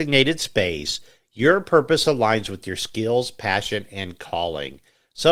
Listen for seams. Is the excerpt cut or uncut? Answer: uncut